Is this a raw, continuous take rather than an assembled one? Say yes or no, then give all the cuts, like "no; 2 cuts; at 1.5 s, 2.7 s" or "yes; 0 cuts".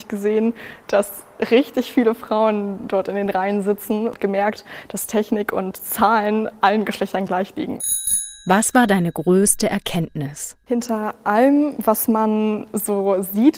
yes; 0 cuts